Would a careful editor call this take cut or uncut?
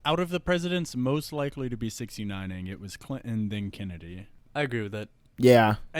uncut